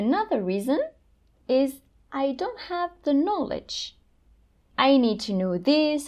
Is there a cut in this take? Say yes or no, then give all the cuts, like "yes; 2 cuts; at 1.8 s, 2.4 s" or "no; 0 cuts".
no; 0 cuts